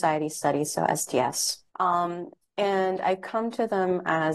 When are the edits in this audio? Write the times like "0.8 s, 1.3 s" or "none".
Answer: 1.7 s